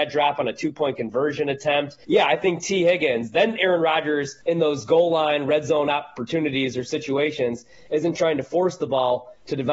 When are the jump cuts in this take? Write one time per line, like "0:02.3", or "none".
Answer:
0:02.0
0:04.4